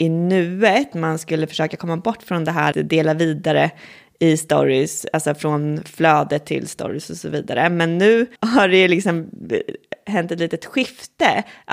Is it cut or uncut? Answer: cut